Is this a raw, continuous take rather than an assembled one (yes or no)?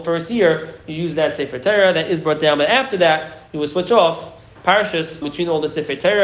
no